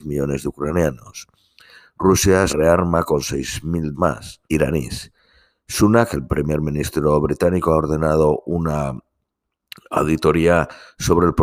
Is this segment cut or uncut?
cut